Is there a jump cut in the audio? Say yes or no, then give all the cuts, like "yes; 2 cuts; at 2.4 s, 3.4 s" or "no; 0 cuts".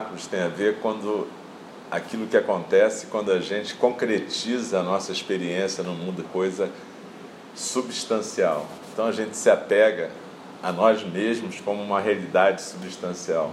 yes; 1 cut; at 6.2 s